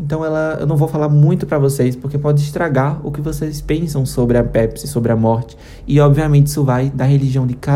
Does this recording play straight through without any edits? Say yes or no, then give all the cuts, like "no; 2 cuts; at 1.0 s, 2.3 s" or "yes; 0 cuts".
yes; 0 cuts